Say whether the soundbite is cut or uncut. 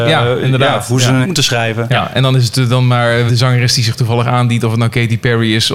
cut